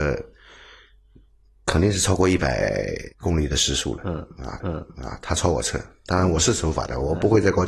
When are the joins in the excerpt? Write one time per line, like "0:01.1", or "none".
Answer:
0:03.1
0:04.6